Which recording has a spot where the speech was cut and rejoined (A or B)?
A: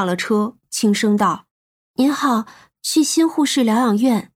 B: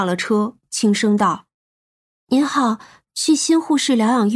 A